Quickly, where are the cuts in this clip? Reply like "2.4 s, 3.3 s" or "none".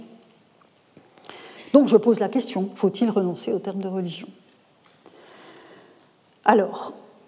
none